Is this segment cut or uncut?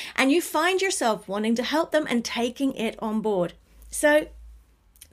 uncut